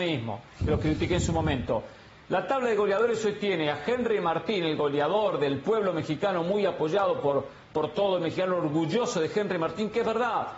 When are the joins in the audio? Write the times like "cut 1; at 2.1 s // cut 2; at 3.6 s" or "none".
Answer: none